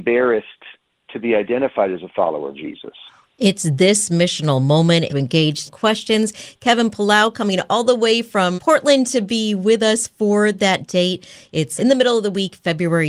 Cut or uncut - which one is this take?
cut